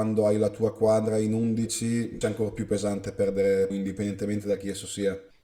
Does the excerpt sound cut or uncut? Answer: cut